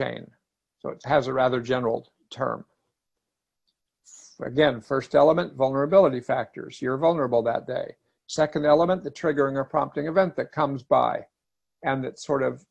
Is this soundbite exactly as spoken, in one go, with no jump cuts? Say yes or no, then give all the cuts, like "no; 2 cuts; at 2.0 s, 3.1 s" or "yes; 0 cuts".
yes; 0 cuts